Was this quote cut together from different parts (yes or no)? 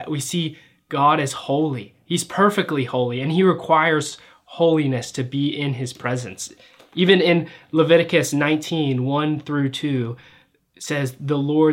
no